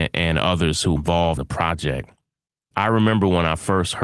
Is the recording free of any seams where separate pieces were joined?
no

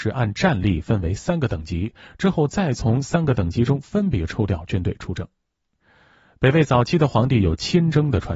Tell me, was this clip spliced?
no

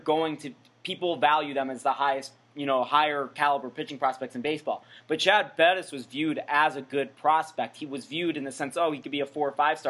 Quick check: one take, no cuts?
yes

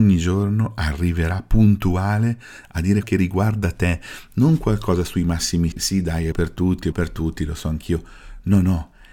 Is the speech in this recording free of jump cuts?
no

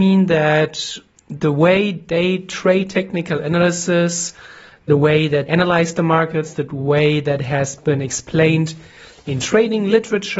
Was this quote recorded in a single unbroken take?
no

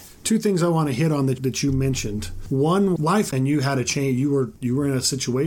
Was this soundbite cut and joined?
yes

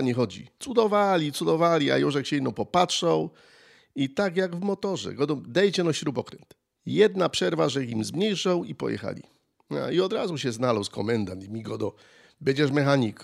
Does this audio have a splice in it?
no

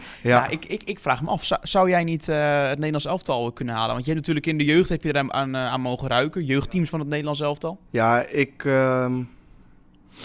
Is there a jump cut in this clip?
yes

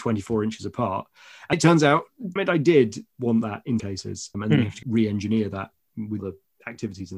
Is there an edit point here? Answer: yes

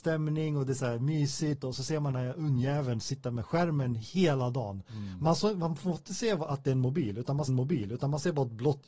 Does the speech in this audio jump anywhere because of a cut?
yes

